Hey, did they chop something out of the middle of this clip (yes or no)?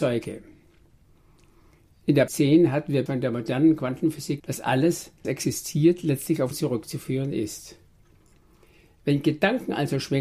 yes